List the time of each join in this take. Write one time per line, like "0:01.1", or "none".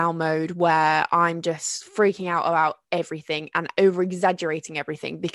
0:02.8